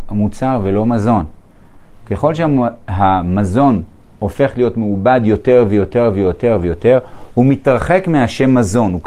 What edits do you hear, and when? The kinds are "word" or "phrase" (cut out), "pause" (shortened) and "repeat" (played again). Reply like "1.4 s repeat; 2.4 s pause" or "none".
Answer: none